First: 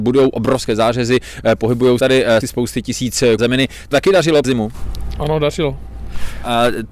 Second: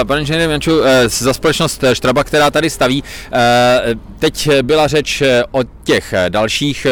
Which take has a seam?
first; 5 cuts; at 2.0 s, 2.4 s, 3.4 s, 3.9 s, 4.4 s

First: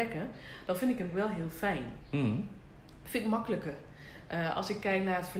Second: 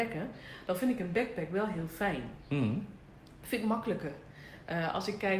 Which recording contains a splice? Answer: first; 1 cut; at 1.1 s

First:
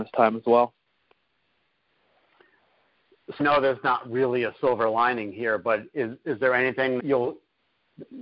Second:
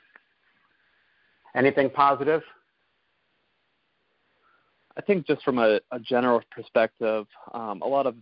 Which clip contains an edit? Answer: first; 3 cuts; at 3.4 s, 6.2 s, 7.0 s

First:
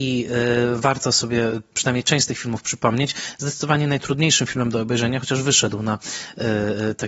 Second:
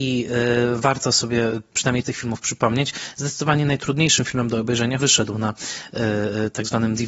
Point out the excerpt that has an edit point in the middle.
second; 2 cuts; at 2.0 s, 5.0 s

